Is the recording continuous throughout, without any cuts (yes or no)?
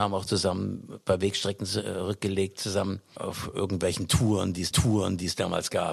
no